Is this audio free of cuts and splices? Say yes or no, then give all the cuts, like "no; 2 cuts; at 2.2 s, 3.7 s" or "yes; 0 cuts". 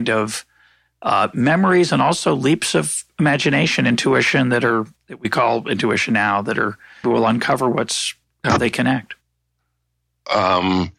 no; 1 cut; at 7.0 s